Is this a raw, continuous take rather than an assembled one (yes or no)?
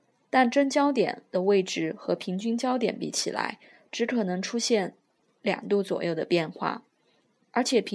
yes